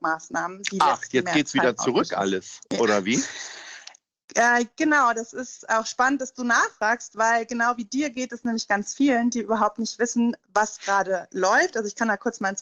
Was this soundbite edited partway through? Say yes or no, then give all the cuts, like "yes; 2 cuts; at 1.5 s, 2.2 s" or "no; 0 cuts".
no; 0 cuts